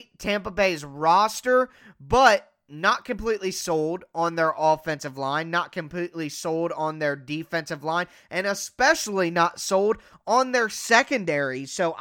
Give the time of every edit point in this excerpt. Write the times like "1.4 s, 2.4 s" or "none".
none